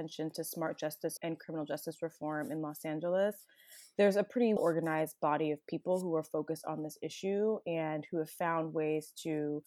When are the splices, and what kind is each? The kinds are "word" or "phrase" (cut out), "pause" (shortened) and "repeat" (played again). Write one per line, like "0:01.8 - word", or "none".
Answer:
0:01.2 - word
0:04.6 - word